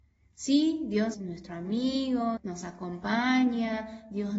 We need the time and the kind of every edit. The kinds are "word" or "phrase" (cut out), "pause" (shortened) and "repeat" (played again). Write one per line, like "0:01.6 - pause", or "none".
0:01.1 - word
0:02.4 - word